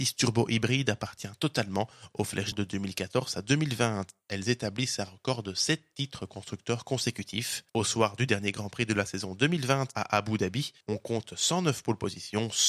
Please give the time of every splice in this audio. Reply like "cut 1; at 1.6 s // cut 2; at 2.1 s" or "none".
cut 1; at 2.5 s // cut 2; at 7.7 s // cut 3; at 10.8 s